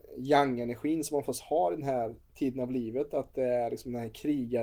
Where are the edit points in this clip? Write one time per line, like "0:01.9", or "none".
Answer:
0:02.2